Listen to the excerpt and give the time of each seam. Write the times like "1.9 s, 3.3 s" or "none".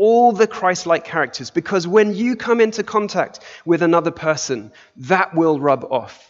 none